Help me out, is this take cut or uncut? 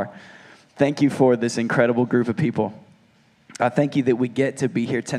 uncut